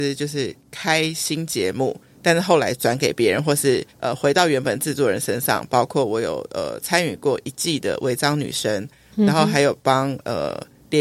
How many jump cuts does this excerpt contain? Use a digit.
1